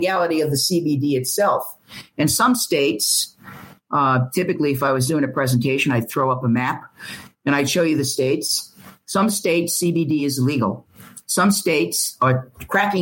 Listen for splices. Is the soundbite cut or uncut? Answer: uncut